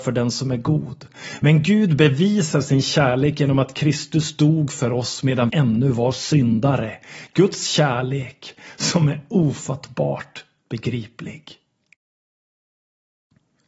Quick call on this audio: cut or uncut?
cut